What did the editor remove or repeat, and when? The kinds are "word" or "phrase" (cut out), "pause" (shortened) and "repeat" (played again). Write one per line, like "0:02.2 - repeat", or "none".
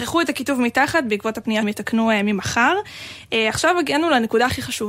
0:01.6 - word